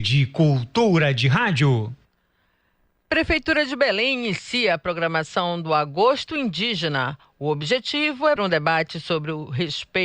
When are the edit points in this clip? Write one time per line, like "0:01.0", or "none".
0:08.4